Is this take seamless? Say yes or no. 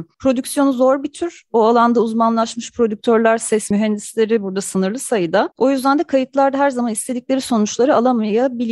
yes